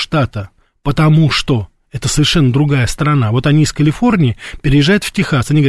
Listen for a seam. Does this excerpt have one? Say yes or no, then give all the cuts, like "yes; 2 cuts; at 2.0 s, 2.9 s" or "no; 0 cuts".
no; 0 cuts